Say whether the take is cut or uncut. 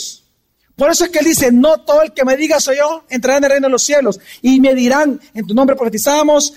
cut